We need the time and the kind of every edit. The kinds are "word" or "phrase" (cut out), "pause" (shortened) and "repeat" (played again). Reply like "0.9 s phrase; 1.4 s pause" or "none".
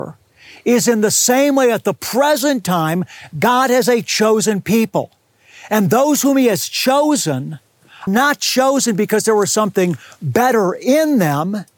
8.1 s word